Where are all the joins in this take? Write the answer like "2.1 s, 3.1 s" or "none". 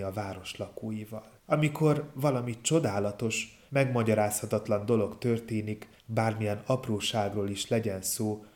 1.4 s, 3.7 s, 6.0 s

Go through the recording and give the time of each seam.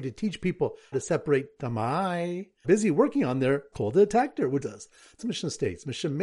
0.9 s, 2.6 s, 3.7 s, 4.6 s, 5.2 s

